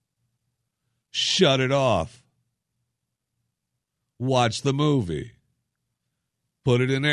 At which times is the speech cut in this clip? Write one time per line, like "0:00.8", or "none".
none